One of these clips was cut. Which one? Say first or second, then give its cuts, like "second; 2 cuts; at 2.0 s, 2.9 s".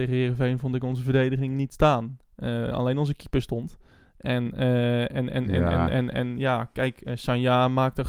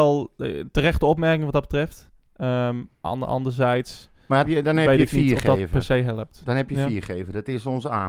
second; 2 cuts; at 3.0 s, 4.4 s